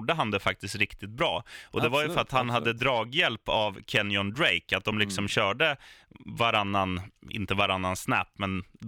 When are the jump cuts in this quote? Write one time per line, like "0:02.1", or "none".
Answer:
none